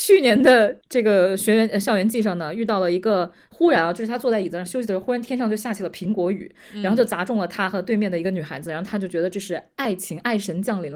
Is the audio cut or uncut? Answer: uncut